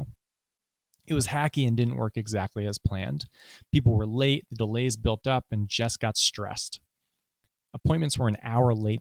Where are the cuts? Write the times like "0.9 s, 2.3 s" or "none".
none